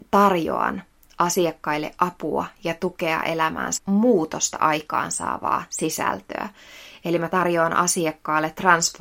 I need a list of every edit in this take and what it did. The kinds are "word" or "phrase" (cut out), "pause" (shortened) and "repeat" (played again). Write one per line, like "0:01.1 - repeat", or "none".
0:03.8 - word